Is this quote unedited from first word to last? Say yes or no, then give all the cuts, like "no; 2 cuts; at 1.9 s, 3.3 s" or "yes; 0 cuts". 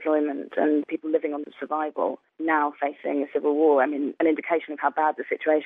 no; 1 cut; at 1.4 s